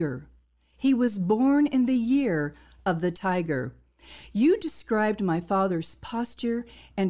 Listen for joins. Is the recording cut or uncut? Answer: uncut